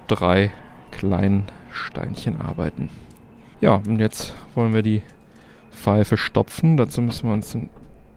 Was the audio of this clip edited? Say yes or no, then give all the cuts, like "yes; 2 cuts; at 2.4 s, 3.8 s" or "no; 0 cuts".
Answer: no; 0 cuts